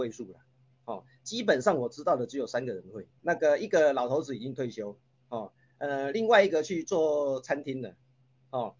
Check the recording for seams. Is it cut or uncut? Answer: cut